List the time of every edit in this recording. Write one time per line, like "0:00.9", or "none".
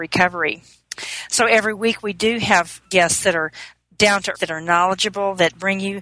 0:04.3